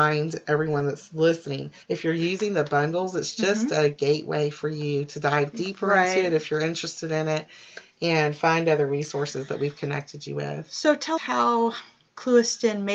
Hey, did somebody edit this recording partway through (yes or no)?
yes